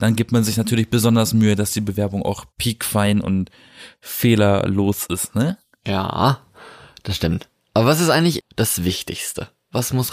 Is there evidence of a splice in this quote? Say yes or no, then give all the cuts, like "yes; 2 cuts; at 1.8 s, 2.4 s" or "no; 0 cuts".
yes; 2 cuts; at 2.5 s, 8.4 s